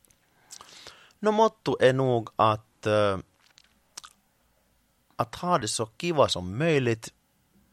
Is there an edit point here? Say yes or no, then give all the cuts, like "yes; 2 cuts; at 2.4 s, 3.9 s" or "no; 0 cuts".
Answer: no; 0 cuts